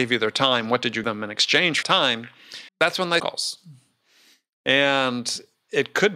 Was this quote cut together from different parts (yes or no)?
yes